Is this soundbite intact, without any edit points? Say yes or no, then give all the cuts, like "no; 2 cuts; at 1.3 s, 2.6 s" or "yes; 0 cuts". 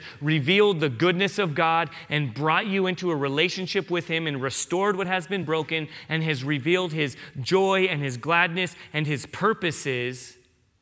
yes; 0 cuts